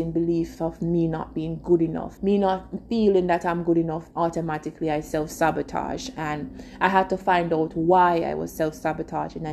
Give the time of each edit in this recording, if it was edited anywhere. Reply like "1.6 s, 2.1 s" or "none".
2.2 s, 4.1 s